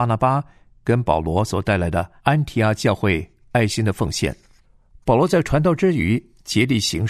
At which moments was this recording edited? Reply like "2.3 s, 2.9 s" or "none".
2.2 s, 4.6 s